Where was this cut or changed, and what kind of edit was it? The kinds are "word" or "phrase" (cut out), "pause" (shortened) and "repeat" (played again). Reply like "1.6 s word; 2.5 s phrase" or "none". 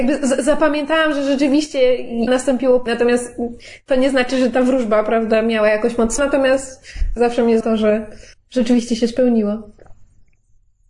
2.3 s word; 2.9 s word; 6.2 s word; 7.2 s word; 7.6 s word; 8.3 s pause